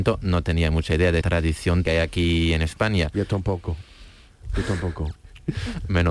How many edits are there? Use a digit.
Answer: 2